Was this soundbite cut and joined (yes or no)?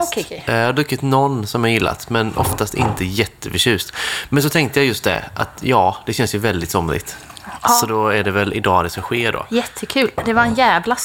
no